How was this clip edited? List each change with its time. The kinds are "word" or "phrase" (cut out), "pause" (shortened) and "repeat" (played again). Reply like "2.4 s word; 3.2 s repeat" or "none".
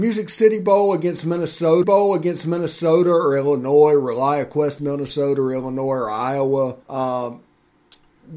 1.8 s repeat; 4.8 s word; 6.8 s pause

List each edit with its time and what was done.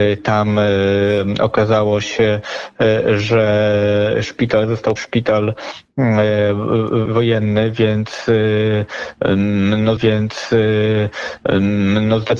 5.0 s word; 7.1 s word; 10.0 s repeat

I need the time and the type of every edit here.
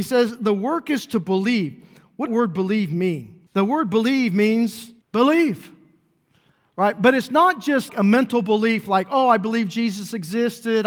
2.3 s phrase; 3.5 s pause; 5.0 s pause; 7.9 s word

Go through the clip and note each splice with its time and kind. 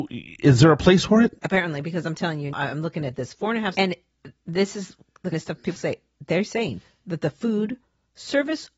1.4 s word; 2.5 s word; 3.7 s word; 5.3 s word; 5.8 s word

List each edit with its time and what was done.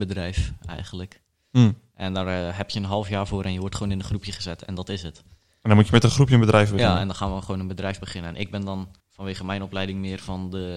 9.0 s pause

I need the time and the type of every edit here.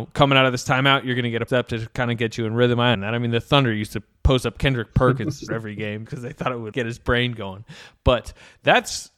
1.5 s word; 2.9 s word; 5.5 s word; 6.1 s word; 6.7 s word

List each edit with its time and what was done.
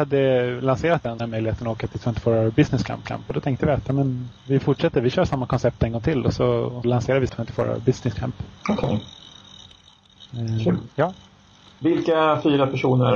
1.2 s phrase; 3.0 s repeat; 4.4 s pause; 6.8 s word; 7.3 s phrase; 8.6 s pause; 10.9 s pause

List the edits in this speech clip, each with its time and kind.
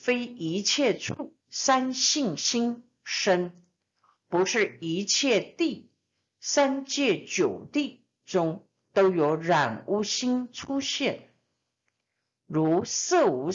1.4 s pause

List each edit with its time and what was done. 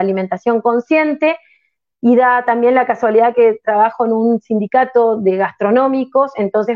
none

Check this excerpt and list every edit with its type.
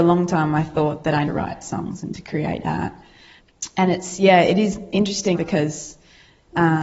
1.2 s phrase; 5.3 s word

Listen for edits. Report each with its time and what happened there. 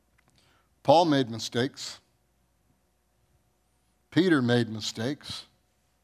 none

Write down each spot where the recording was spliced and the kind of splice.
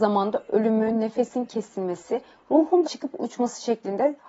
2.8 s word

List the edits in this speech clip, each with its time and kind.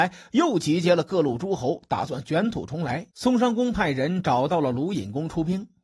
3.1 s pause

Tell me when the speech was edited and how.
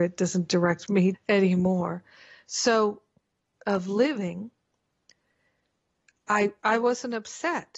1.1 s word; 3.5 s phrase

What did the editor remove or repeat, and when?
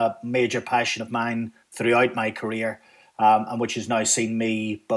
none

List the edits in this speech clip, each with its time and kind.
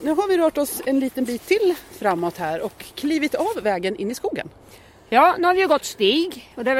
none

